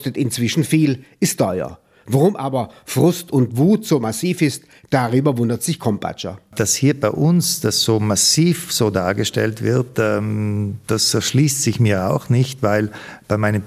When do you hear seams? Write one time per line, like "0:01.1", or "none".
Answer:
none